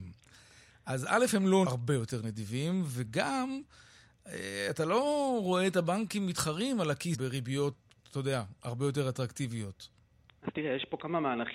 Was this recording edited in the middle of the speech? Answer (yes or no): yes